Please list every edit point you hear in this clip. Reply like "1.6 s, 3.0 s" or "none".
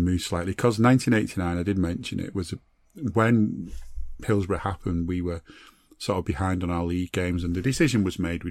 none